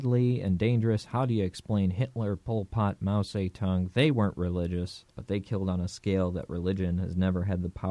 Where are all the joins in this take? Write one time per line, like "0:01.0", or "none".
0:05.1

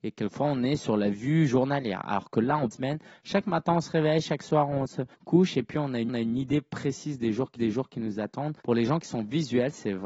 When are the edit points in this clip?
0:02.7
0:05.1
0:06.1
0:07.6
0:08.6

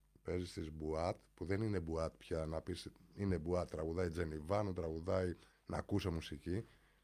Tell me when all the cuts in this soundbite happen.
0:05.5

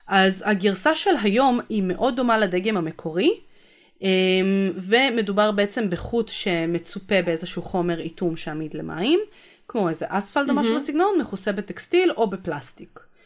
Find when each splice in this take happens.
none

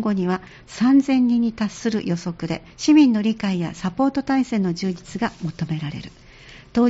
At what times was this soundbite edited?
0:02.7

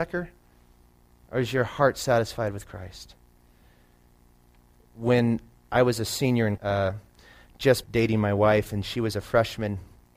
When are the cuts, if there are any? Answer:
0:06.6
0:07.8

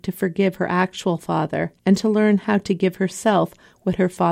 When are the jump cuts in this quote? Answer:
0:01.8

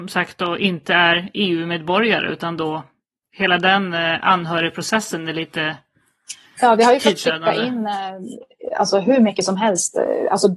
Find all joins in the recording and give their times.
none

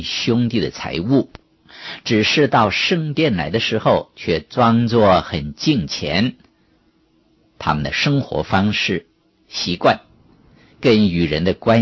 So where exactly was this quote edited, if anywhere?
none

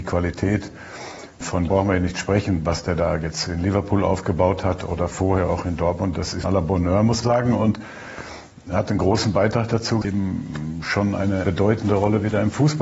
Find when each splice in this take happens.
0:01.7
0:06.4
0:07.2
0:10.0

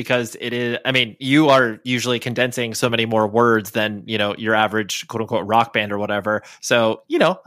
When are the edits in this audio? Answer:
none

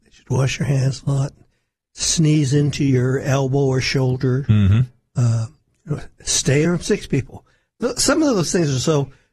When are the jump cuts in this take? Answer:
0:06.6

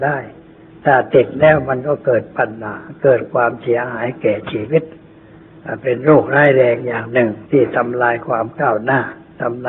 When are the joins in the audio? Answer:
0:07.5

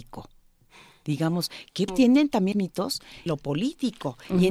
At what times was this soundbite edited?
0:01.9
0:02.5
0:03.3

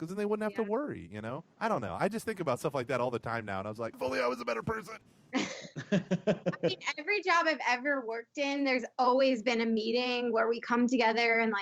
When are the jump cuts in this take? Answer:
0:01.5
0:03.9
0:05.0

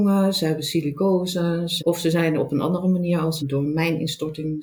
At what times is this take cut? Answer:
0:01.8
0:03.4

